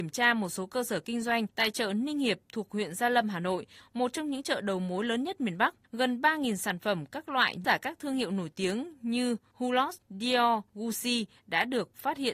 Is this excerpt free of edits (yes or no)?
no